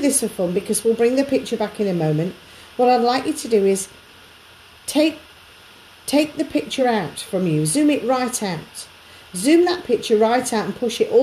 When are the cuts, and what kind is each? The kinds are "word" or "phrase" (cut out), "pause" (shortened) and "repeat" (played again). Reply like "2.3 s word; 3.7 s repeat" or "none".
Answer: none